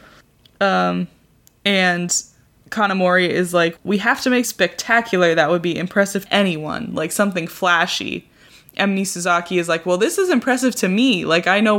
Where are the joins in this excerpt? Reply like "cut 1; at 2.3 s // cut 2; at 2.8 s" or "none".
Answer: cut 1; at 3.8 s // cut 2; at 4.4 s // cut 3; at 6.3 s